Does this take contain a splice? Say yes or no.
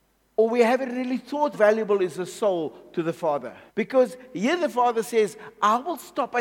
yes